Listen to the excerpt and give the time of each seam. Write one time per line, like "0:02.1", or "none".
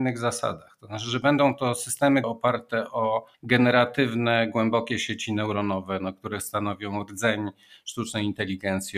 0:02.2
0:03.3